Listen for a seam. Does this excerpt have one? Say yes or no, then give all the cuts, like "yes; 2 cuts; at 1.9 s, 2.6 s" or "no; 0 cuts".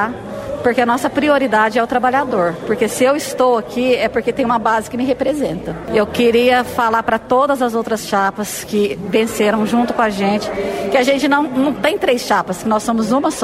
no; 0 cuts